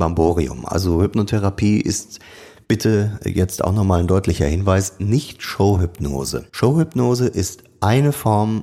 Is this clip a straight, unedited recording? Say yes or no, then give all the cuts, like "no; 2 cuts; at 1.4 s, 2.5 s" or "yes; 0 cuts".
no; 1 cut; at 6.5 s